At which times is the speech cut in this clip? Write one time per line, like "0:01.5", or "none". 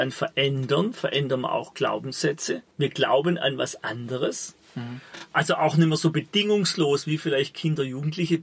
0:02.7